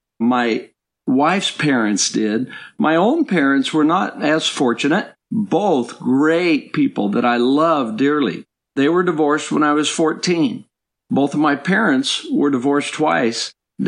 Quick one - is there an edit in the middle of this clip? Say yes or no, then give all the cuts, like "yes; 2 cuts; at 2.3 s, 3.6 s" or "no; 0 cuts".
no; 0 cuts